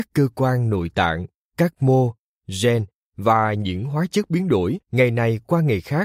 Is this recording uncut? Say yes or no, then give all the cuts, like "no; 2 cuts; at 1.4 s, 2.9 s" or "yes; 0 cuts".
yes; 0 cuts